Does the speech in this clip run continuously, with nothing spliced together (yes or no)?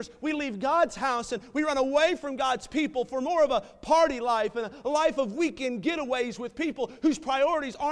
yes